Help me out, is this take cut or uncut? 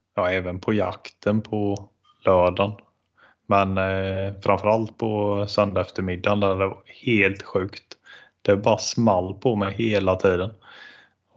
uncut